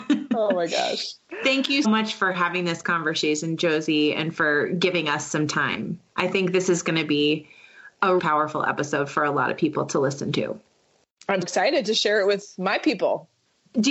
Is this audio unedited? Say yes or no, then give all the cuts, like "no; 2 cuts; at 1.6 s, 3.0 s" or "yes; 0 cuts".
no; 3 cuts; at 1.8 s, 8.2 s, 11.4 s